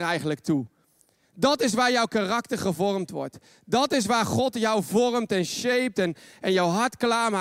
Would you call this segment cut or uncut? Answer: uncut